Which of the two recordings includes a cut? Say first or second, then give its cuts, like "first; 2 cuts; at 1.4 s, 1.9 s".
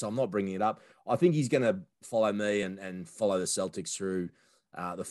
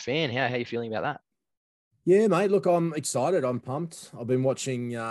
second; 1 cut; at 3.6 s